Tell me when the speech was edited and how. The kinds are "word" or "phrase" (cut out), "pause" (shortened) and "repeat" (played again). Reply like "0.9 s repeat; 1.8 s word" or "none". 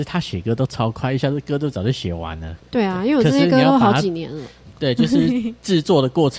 2.6 s pause